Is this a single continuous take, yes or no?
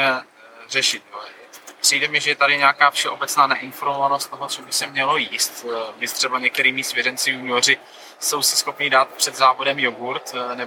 yes